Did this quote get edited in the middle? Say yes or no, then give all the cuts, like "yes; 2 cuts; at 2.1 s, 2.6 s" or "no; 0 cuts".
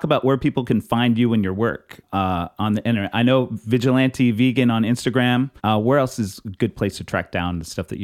yes; 2 cuts; at 2.0 s, 5.6 s